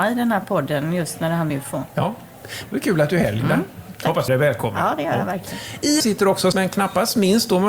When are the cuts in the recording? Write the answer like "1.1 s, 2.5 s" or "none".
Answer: 1.5 s, 4.3 s, 6.0 s, 6.5 s